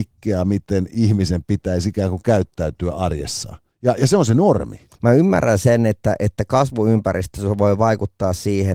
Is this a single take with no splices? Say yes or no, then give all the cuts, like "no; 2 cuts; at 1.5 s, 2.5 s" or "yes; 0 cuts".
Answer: no; 2 cuts; at 3.7 s, 4.9 s